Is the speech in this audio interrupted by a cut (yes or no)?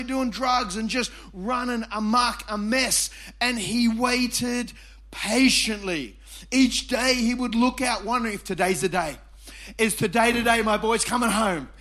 no